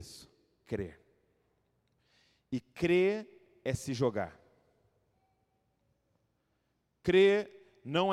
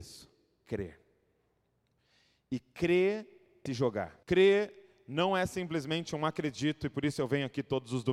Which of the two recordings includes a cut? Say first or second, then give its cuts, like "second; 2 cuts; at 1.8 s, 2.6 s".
second; 2 cuts; at 3.7 s, 4.2 s